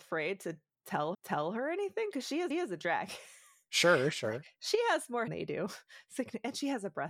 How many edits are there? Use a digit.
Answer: 3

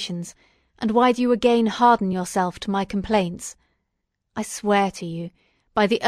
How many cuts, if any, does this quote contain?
0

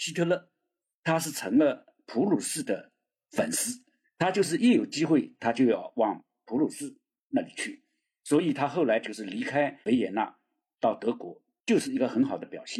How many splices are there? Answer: 2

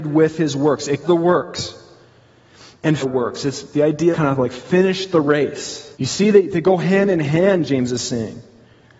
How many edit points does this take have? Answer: 4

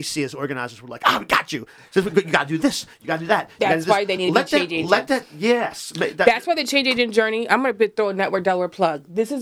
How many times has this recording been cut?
0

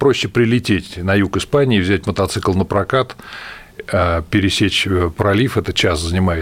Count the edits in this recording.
0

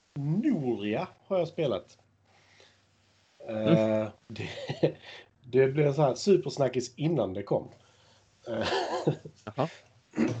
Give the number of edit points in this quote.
1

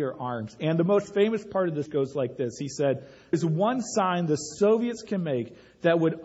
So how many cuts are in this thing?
2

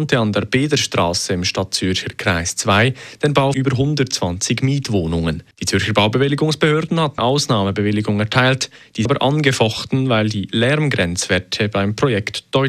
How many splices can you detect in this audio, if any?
4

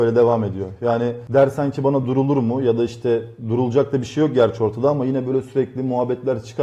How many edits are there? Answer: 0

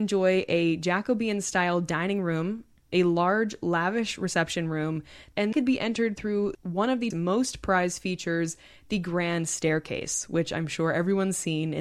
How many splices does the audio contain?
2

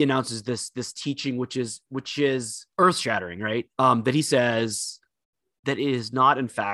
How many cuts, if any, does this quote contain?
2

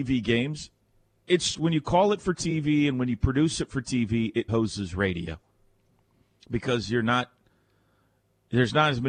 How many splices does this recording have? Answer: 2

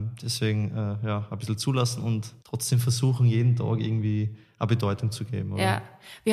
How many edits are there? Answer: 1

